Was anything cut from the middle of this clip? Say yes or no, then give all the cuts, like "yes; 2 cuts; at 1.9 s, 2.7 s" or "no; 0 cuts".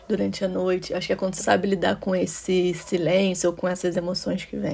yes; 1 cut; at 1.4 s